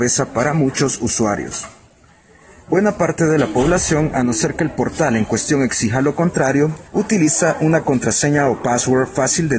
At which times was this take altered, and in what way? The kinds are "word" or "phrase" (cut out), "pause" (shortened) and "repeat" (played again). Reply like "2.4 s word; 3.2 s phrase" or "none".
6.9 s pause